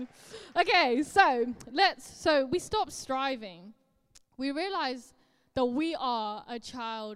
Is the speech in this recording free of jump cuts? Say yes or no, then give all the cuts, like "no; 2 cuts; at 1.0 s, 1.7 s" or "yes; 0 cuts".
yes; 0 cuts